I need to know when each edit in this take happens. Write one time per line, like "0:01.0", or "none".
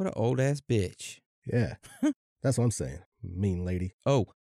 0:03.1